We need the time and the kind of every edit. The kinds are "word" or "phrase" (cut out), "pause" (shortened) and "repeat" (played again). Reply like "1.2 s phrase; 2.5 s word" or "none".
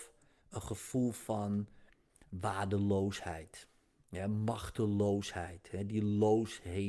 none